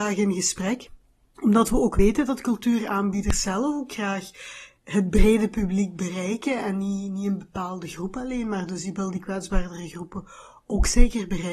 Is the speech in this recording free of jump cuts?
yes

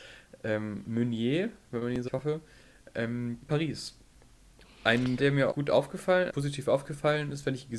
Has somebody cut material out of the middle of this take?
yes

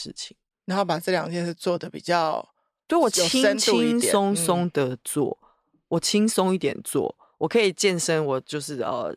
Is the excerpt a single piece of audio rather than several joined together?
yes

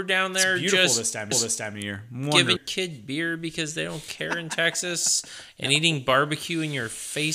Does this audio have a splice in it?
yes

